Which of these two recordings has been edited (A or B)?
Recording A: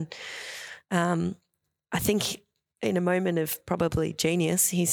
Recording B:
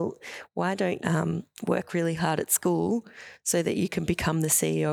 B